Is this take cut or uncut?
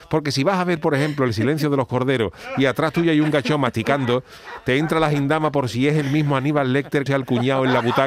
cut